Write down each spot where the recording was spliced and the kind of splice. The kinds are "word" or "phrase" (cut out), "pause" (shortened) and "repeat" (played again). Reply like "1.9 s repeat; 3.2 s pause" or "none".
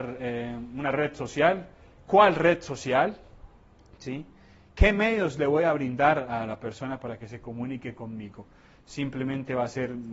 none